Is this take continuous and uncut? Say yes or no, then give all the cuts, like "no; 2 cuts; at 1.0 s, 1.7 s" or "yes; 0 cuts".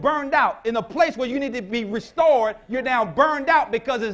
yes; 0 cuts